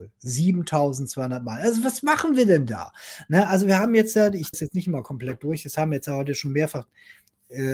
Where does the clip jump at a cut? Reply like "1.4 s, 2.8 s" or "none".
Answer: 4.5 s